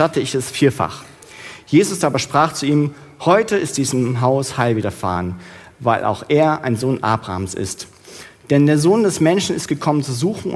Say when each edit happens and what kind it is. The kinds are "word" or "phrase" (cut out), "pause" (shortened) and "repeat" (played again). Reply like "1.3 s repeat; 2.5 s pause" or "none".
none